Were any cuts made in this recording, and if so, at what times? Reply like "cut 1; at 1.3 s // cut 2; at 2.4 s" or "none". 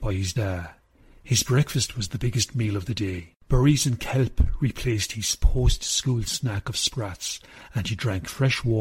cut 1; at 0.9 s // cut 2; at 3.4 s